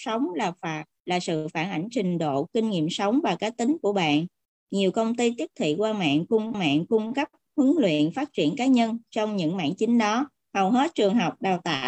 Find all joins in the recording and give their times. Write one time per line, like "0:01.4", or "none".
0:06.5
0:10.4